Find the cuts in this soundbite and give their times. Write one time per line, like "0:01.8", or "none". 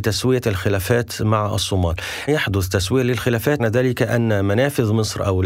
0:02.3
0:03.6